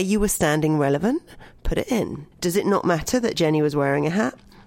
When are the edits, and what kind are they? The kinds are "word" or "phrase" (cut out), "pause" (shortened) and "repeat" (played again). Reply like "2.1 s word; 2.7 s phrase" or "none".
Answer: 2.3 s pause